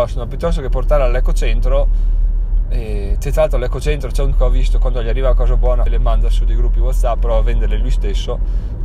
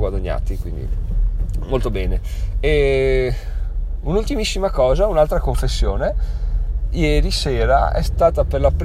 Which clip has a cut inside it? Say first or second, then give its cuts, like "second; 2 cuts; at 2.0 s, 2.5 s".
first; 3 cuts; at 4.3 s, 5.9 s, 7.2 s